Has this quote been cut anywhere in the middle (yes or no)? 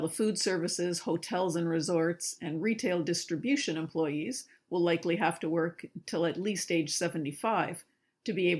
no